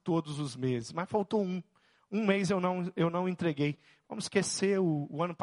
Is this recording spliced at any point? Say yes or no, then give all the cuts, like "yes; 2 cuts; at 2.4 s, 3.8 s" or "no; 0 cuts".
no; 0 cuts